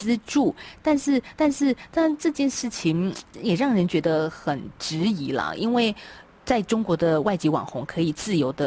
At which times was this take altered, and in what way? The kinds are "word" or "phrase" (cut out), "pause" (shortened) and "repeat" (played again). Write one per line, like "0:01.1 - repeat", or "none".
0:01.3 - repeat
0:03.3 - word